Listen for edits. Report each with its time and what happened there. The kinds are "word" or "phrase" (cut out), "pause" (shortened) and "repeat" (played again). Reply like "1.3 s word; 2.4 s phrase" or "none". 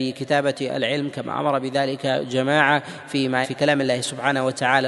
3.4 s word